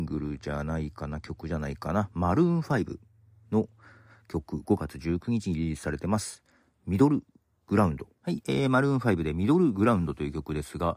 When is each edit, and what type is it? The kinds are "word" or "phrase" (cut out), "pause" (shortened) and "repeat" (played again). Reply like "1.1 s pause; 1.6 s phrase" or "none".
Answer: 8.1 s pause